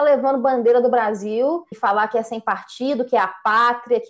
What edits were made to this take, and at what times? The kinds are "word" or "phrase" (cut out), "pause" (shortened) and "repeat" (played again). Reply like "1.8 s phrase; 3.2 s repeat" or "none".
1.7 s word